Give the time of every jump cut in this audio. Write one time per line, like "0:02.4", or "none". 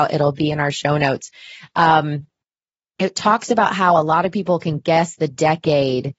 none